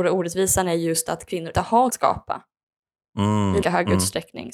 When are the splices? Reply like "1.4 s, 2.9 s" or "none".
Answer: 1.5 s, 1.9 s, 3.6 s